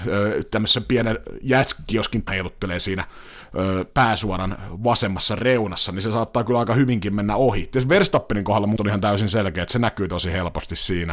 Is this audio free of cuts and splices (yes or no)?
no